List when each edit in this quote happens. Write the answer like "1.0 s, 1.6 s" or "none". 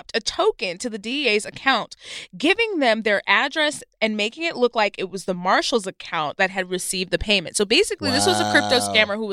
none